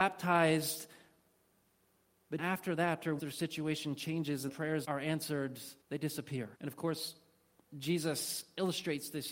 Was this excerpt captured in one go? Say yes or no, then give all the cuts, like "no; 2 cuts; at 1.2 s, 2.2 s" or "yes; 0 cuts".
no; 6 cuts; at 2.4 s, 3.2 s, 4.5 s, 4.8 s, 5.8 s, 6.5 s